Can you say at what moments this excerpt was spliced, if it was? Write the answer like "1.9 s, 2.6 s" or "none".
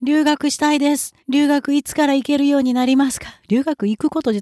1.2 s